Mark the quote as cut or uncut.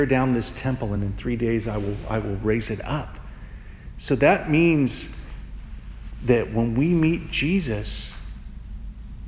uncut